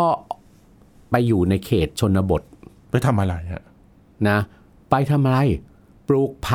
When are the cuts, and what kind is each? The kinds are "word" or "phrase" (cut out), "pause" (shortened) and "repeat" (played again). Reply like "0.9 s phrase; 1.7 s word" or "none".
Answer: none